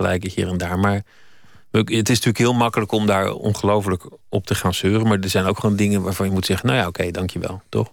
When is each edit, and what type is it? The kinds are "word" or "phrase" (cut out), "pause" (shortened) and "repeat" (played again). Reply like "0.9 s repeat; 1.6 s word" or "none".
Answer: none